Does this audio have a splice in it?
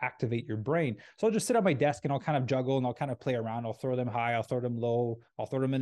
no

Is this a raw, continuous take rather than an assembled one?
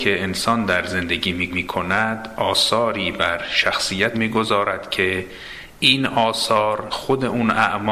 no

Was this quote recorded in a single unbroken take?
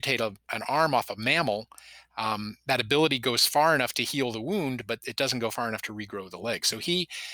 yes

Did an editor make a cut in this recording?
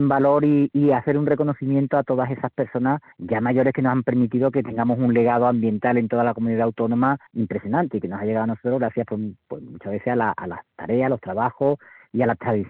yes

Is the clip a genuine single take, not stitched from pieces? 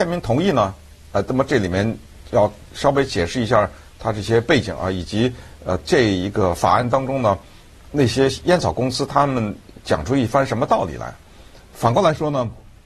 yes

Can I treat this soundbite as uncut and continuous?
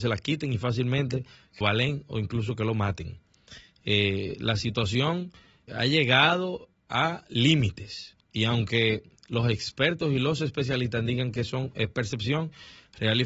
no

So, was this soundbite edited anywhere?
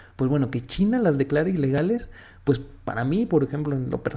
no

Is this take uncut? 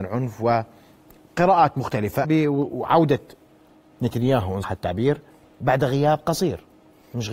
no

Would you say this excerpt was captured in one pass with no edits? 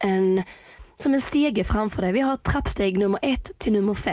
yes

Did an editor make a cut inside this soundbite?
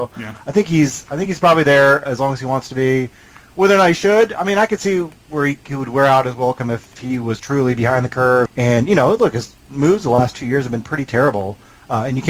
yes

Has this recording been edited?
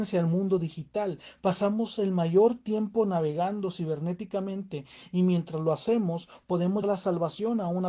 yes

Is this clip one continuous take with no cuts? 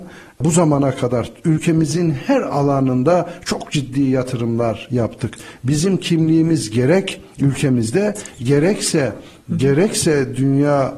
yes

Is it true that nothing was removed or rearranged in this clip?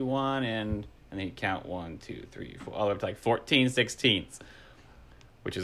yes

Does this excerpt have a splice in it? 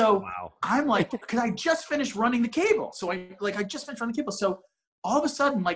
no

